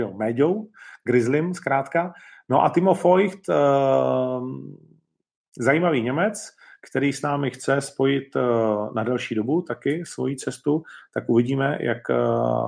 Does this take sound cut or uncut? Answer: uncut